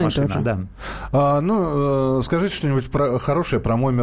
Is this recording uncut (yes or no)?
yes